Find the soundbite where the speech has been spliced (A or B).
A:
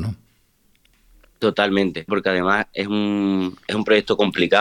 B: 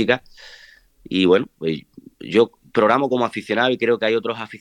A